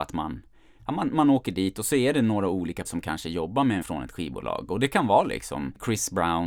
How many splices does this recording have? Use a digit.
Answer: 2